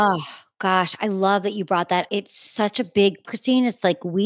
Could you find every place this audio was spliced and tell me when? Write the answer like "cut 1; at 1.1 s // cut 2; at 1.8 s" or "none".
cut 1; at 2.1 s // cut 2; at 3.2 s

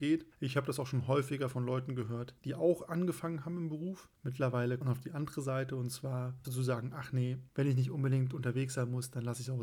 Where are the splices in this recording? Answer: cut 1; at 2.4 s // cut 2; at 4.8 s // cut 3; at 6.4 s

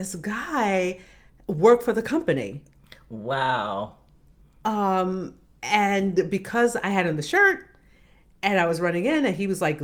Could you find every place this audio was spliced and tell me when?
none

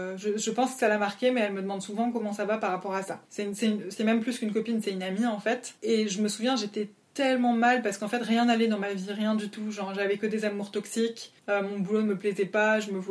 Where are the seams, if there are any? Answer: cut 1; at 3.3 s // cut 2; at 5.8 s // cut 3; at 11.4 s

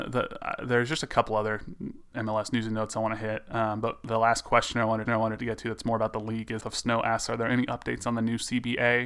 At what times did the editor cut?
cut 1; at 5.1 s // cut 2; at 6.6 s

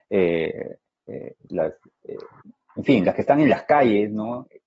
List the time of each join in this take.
cut 1; at 1.5 s

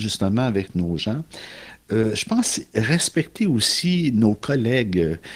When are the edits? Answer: none

